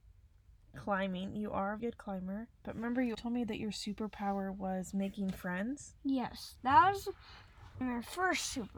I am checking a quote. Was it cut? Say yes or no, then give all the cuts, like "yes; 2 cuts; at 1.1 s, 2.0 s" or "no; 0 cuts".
yes; 4 cuts; at 1.8 s, 2.6 s, 3.1 s, 7.8 s